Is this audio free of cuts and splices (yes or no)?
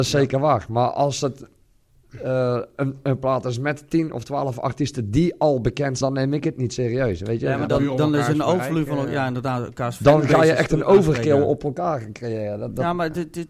no